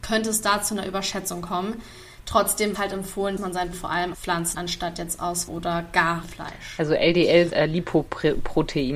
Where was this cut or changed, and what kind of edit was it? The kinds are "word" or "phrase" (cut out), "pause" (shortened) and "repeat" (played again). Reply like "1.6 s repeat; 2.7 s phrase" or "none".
2.7 s word; 3.4 s word; 3.7 s word; 4.1 s word; 4.5 s word; 5.5 s word; 6.2 s word; 7.5 s word